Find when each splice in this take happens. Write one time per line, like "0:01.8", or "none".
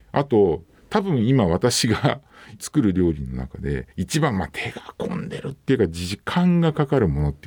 0:03.9